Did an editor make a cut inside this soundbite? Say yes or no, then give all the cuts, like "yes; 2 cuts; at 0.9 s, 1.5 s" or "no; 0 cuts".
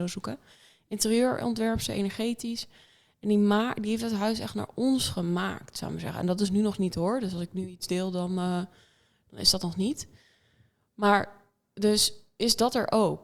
no; 0 cuts